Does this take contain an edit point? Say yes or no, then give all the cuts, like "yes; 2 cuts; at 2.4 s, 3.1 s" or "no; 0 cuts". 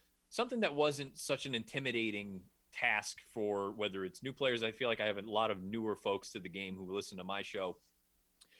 no; 0 cuts